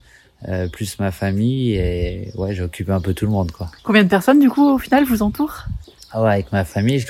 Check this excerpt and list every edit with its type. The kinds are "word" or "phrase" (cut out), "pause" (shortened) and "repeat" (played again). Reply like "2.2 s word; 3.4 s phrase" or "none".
3.8 s pause; 6.0 s pause